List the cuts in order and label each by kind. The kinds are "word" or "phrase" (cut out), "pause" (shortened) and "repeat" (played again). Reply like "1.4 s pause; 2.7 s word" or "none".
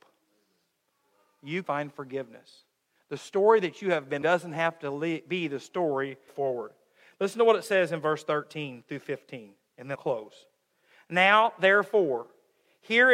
1.6 s word; 4.2 s word; 6.3 s phrase; 9.9 s word